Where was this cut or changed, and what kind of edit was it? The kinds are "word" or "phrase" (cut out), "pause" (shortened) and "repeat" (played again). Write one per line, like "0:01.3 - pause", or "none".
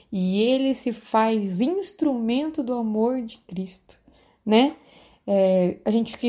none